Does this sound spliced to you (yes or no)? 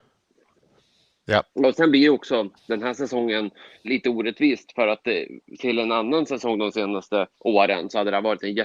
yes